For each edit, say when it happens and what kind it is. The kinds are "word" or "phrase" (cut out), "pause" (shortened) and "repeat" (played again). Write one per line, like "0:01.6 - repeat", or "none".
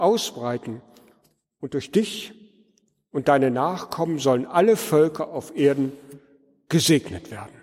none